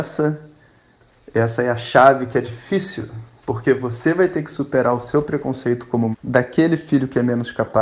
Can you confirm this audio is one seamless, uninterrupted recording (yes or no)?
no